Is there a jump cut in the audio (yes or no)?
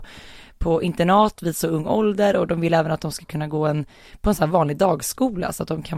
no